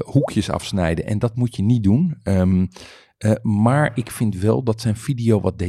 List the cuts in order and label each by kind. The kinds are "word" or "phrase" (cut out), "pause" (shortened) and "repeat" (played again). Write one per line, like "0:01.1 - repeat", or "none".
none